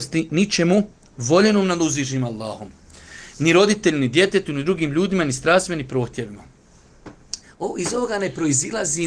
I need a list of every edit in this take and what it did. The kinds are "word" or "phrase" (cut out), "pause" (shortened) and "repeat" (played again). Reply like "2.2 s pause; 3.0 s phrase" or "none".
none